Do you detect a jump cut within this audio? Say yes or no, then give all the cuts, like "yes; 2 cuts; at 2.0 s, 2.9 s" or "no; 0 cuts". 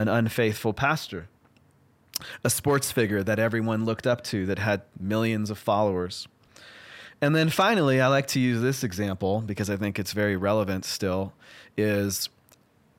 no; 0 cuts